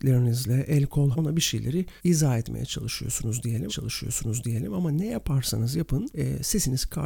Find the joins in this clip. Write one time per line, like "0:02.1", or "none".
0:01.1
0:02.0
0:03.7